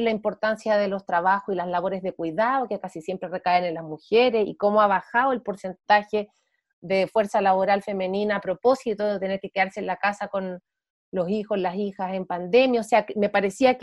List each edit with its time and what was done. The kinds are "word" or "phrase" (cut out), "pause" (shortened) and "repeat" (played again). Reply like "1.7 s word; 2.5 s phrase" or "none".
none